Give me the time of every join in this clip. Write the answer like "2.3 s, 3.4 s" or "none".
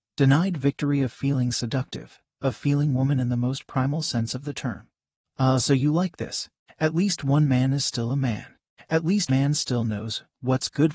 9.3 s

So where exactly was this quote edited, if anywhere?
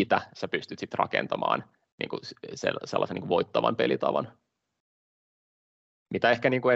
1.7 s

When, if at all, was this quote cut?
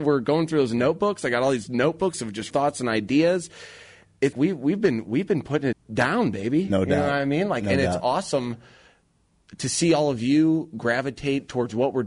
1.7 s, 2.5 s, 4.3 s, 5.7 s

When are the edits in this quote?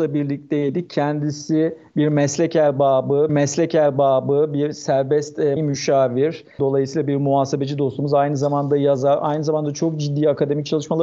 3.3 s, 5.6 s

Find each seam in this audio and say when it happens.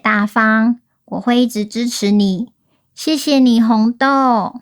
none

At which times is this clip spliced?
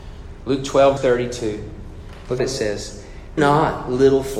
1.0 s, 2.4 s, 3.4 s

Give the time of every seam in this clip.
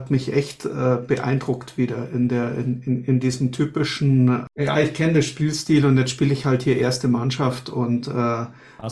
none

